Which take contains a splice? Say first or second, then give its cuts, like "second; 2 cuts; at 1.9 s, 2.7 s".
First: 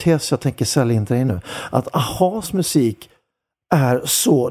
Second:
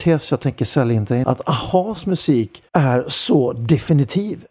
second; 2 cuts; at 1.2 s, 2.7 s